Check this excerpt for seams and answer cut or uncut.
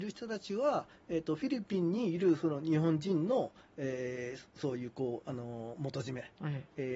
uncut